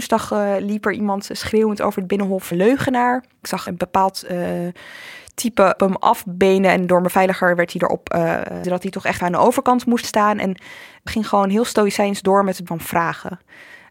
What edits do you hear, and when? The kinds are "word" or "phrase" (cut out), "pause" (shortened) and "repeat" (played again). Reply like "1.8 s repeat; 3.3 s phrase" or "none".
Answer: 2.5 s word; 3.7 s word; 5.8 s word; 8.6 s word; 9.2 s word; 10.0 s word; 11.1 s word; 12.7 s word